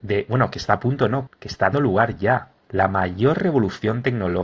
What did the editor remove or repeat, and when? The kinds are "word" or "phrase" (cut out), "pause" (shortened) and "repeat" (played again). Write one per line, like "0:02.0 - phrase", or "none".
0:01.3 - word
0:01.7 - word
0:02.6 - pause

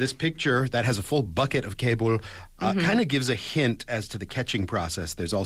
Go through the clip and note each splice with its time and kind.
none

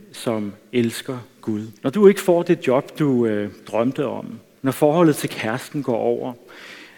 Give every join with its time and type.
0:01.8 - pause

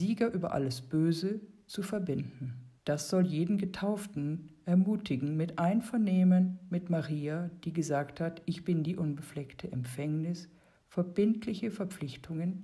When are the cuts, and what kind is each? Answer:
0:02.8 - pause

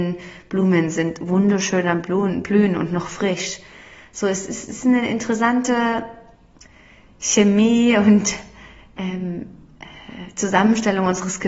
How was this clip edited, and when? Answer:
none

